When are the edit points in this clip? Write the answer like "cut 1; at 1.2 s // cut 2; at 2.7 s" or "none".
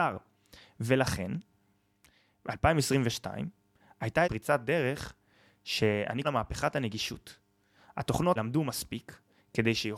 cut 1; at 4.2 s // cut 2; at 6.2 s // cut 3; at 8.4 s